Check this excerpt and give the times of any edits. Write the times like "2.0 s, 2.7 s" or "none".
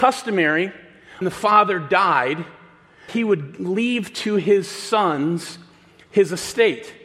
1.2 s, 3.1 s